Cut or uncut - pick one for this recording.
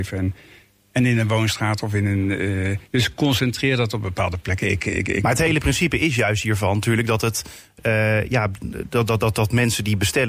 cut